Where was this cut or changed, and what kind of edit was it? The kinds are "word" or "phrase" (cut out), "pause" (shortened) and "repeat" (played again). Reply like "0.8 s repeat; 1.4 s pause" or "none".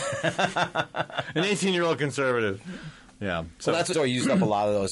3.9 s word